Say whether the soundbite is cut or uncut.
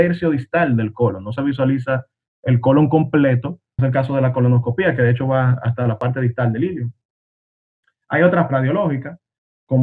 cut